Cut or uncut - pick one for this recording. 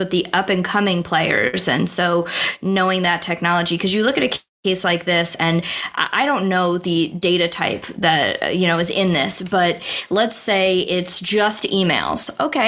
uncut